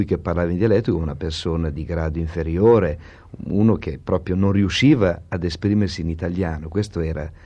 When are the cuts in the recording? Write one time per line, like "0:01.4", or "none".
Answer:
none